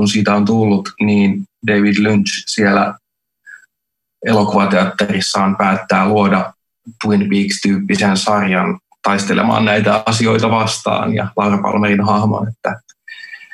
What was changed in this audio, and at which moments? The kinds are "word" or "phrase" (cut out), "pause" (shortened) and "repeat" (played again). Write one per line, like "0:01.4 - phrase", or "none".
none